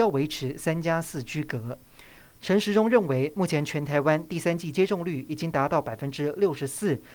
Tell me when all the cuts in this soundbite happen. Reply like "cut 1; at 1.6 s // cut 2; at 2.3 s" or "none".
none